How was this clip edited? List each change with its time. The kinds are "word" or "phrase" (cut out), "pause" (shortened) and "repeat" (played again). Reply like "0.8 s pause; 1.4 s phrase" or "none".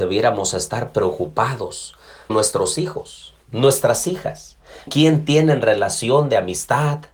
2.3 s word; 4.9 s word